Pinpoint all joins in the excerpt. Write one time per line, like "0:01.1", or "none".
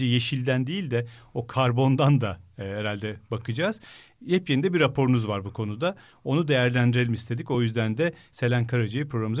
none